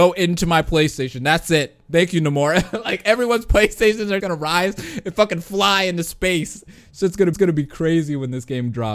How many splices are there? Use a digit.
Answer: 2